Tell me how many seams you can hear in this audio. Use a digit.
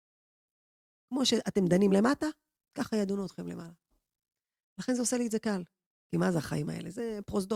0